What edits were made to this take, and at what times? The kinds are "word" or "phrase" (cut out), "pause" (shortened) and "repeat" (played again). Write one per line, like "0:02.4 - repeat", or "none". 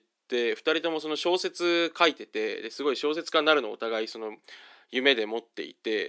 none